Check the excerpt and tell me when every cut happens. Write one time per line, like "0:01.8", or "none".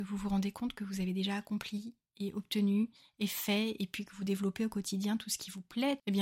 none